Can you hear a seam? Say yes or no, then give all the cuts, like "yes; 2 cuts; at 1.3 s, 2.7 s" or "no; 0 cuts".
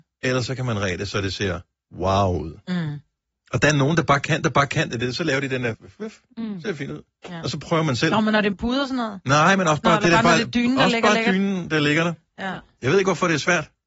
yes; 5 cuts; at 1.7 s, 3.3 s, 4.4 s, 5.7 s, 8.5 s